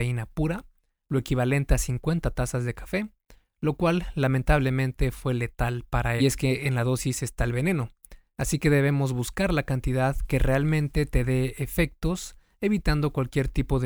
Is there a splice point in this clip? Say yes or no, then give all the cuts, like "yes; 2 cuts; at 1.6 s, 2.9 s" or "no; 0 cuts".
yes; 1 cut; at 6.2 s